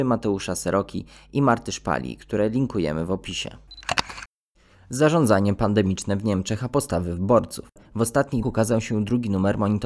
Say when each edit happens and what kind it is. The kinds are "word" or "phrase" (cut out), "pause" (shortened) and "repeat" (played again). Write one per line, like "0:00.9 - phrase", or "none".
0:08.4 - word